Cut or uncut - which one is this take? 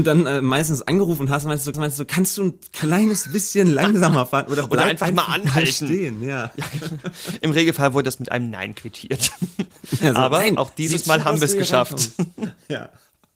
cut